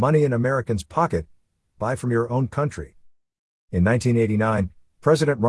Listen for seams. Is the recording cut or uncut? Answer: uncut